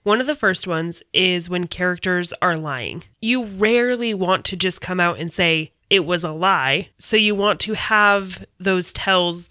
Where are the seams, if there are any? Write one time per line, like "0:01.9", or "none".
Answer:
0:03.1
0:05.8
0:06.9

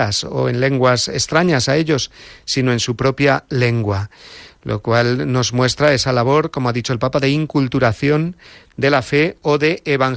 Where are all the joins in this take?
none

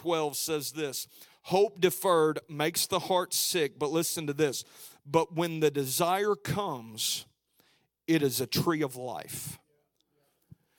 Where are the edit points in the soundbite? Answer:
none

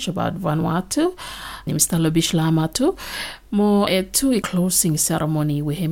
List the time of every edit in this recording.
0:01.7
0:03.9
0:04.4

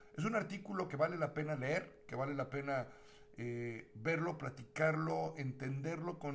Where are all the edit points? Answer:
none

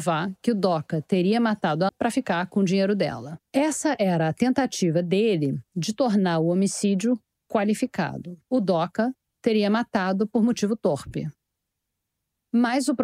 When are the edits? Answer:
0:01.9
0:03.5
0:08.4

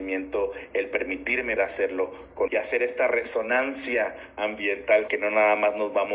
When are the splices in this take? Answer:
0:01.6
0:02.5
0:05.1

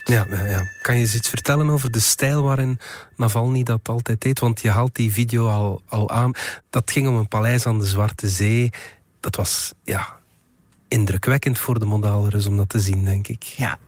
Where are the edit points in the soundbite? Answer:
none

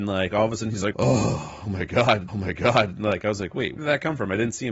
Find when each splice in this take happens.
0:00.9
0:02.3
0:03.8

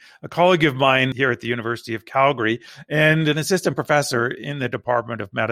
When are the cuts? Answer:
none

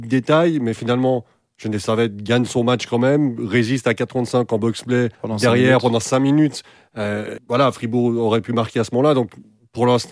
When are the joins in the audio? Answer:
0:05.1
0:07.4

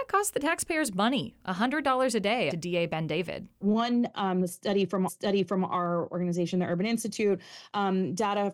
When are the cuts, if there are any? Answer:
0:02.5
0:05.1

